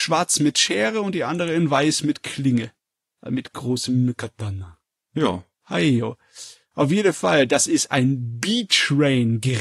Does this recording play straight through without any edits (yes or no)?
yes